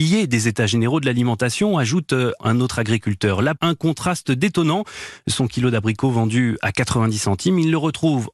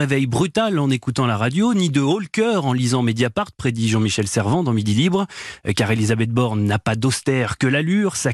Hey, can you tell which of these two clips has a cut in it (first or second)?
first